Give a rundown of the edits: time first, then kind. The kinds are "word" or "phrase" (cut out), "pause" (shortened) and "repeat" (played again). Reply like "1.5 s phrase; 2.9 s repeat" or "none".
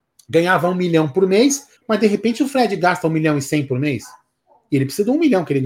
1.8 s pause